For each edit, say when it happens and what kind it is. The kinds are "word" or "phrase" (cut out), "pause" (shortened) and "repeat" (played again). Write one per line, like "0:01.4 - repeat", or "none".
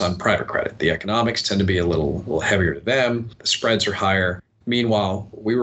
none